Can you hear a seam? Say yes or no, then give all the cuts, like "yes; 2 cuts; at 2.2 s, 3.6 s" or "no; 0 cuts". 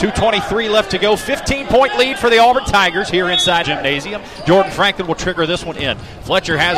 yes; 1 cut; at 3.6 s